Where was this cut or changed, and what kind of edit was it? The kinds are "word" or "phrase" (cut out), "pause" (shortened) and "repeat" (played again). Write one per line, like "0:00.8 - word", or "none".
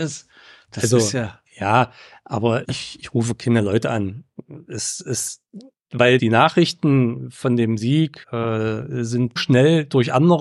0:02.6 - word
0:06.2 - word
0:08.2 - pause
0:09.4 - word